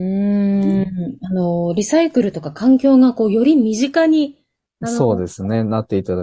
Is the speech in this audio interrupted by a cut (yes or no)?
no